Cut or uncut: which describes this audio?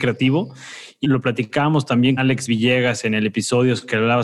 cut